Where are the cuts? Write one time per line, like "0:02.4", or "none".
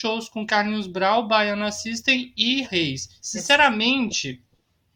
0:02.6